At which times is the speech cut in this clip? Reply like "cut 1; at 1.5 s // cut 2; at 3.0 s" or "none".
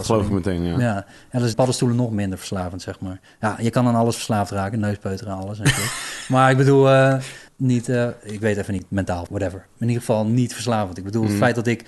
cut 1; at 1.5 s // cut 2; at 7.5 s // cut 3; at 9.3 s

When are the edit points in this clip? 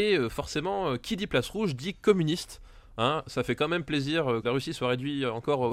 cut 1; at 4.4 s

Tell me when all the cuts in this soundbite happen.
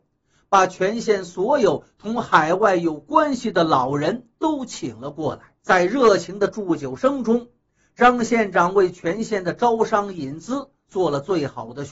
cut 1; at 5.6 s

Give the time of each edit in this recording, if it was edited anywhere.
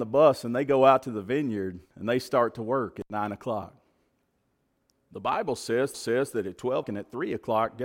cut 1; at 1.9 s // cut 2; at 5.9 s // cut 3; at 6.8 s

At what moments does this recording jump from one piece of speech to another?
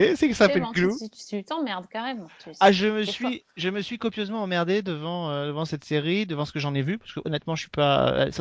none

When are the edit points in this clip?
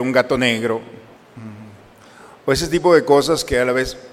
none

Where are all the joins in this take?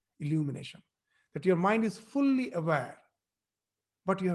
none

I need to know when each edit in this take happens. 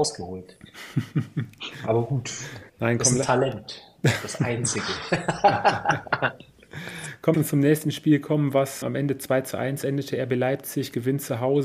cut 1; at 2.7 s // cut 2; at 7.3 s // cut 3; at 8.8 s

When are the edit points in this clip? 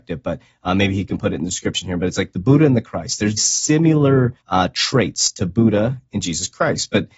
cut 1; at 3.4 s // cut 2; at 4.4 s

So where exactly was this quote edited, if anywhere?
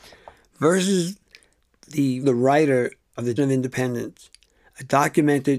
cut 1; at 2.2 s // cut 2; at 3.4 s

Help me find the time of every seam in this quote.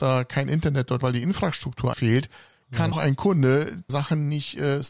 cut 1; at 1.0 s // cut 2; at 1.9 s // cut 3; at 2.9 s // cut 4; at 3.9 s

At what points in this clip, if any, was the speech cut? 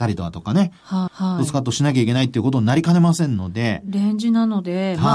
cut 1; at 1.1 s

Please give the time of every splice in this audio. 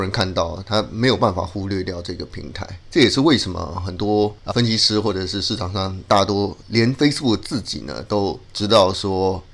cut 1; at 4.5 s

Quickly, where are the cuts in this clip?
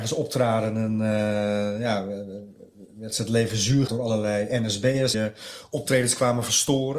cut 1; at 3.9 s // cut 2; at 5.1 s

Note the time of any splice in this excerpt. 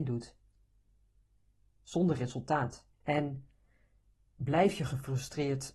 cut 1; at 2.9 s

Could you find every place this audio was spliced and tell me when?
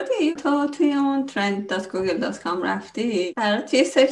none

